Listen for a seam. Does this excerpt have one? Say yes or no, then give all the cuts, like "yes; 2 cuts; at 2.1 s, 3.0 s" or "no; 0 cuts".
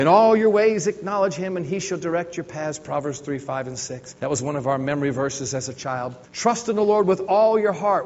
yes; 2 cuts; at 4.2 s, 6.2 s